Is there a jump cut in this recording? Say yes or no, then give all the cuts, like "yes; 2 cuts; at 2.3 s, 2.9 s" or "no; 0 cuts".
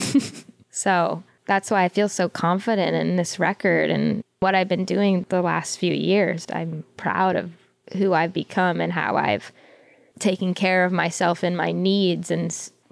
no; 0 cuts